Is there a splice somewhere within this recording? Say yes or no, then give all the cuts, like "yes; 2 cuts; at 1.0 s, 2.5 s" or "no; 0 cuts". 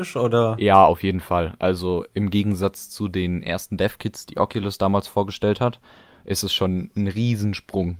no; 0 cuts